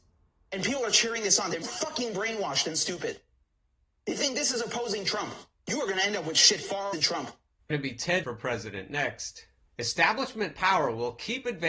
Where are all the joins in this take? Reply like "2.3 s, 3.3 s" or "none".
1.6 s, 6.9 s, 7.7 s, 8.2 s